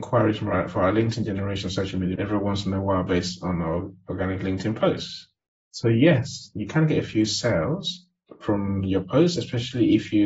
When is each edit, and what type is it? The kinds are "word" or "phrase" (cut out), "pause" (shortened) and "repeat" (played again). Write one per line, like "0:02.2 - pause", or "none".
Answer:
0:02.2 - word